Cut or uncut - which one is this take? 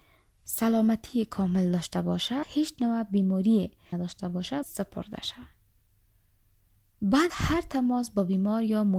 cut